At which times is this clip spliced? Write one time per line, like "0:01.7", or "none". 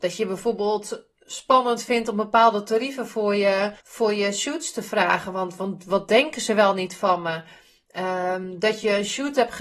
0:03.8